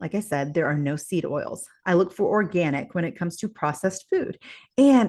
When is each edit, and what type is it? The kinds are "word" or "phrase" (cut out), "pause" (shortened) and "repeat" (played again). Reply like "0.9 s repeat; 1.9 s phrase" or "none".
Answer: none